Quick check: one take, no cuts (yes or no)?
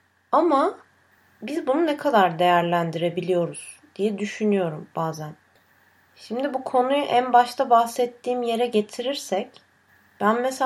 yes